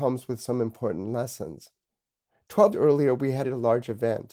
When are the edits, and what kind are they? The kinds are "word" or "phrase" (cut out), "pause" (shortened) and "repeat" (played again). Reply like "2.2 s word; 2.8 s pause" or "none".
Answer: 2.7 s word; 3.4 s word